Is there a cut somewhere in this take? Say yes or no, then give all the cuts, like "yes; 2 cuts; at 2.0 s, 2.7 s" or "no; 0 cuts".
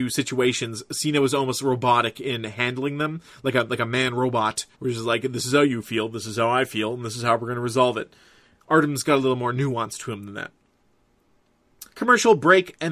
yes; 2 cuts; at 4.7 s, 11.9 s